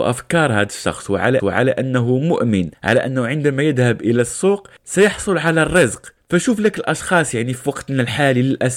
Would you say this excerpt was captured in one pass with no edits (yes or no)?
no